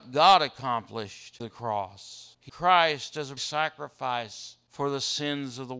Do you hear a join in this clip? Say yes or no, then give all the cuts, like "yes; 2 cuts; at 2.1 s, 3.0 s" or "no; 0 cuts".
yes; 3 cuts; at 1.4 s, 2.5 s, 3.4 s